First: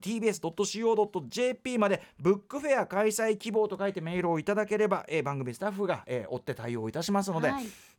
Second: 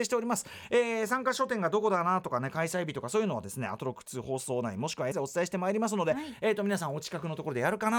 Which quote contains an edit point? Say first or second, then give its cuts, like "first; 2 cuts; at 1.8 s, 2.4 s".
second; 1 cut; at 5.1 s